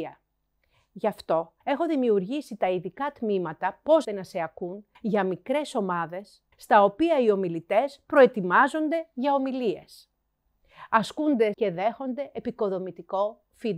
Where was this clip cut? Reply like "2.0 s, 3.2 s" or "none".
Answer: 1.6 s, 4.0 s, 4.9 s, 6.5 s, 11.5 s